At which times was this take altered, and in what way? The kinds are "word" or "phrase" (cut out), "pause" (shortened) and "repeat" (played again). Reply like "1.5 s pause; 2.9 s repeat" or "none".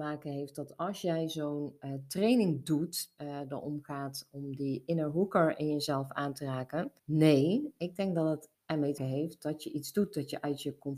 3.2 s phrase; 7.0 s pause; 8.5 s pause; 9.0 s word